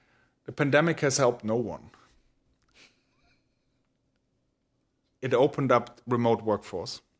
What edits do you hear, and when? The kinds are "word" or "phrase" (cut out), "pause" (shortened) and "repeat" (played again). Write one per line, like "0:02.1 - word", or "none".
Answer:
none